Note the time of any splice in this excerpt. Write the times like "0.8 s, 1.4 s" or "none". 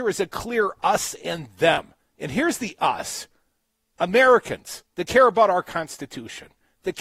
2.0 s, 4.9 s